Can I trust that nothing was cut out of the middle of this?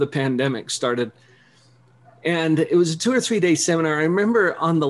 yes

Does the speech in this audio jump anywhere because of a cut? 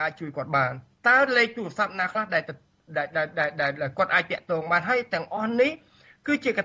yes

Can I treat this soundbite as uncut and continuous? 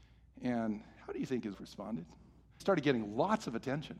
no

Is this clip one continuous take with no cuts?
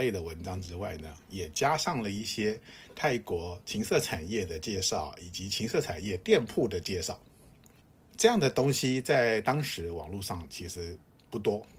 no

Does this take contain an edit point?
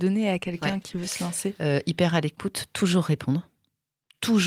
no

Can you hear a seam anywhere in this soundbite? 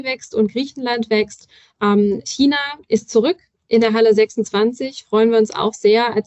no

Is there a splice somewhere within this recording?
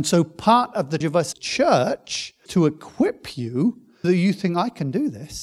yes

